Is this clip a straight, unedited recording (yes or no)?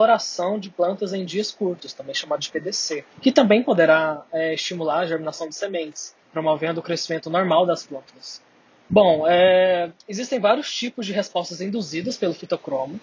no